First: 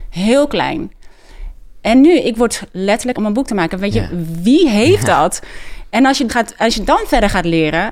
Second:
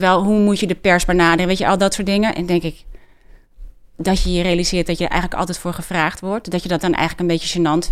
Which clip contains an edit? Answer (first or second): first